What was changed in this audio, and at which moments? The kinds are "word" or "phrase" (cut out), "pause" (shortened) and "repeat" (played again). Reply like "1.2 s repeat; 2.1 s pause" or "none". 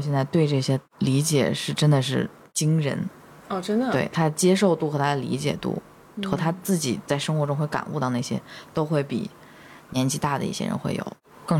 none